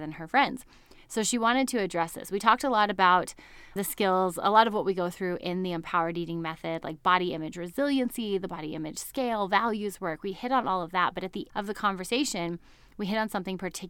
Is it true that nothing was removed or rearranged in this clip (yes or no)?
no